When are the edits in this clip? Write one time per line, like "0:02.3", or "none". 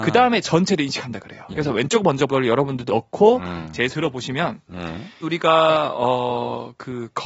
0:01.5
0:02.3
0:02.9
0:03.9
0:05.2